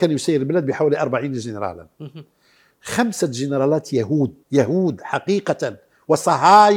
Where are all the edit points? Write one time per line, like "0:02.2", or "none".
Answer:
0:01.9
0:04.4